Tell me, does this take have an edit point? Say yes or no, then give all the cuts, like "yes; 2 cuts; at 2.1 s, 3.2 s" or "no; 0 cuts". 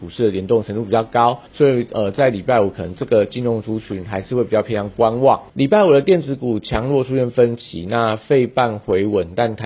yes; 2 cuts; at 1.5 s, 5.5 s